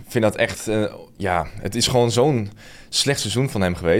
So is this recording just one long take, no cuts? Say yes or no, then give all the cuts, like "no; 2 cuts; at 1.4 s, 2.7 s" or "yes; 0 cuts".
yes; 0 cuts